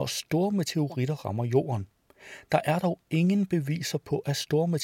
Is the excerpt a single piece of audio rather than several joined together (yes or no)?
yes